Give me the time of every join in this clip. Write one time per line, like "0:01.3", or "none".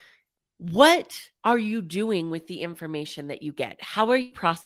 0:01.4